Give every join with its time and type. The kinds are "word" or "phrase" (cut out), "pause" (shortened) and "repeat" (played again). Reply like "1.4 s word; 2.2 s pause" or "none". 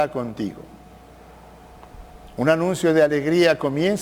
none